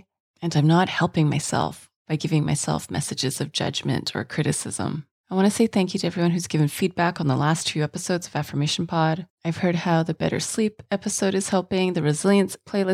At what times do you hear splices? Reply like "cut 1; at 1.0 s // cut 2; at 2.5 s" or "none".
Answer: cut 1; at 5.1 s // cut 2; at 9.3 s